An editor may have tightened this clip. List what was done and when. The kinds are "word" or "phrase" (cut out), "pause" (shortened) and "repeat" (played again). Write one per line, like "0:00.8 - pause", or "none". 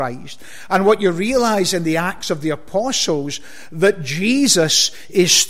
none